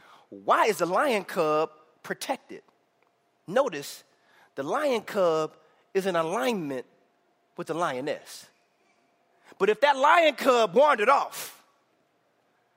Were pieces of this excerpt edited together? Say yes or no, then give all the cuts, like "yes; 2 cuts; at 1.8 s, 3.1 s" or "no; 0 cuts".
no; 0 cuts